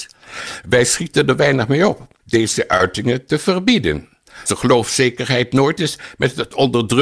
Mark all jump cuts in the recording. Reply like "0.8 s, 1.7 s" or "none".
2.2 s, 4.5 s, 5.8 s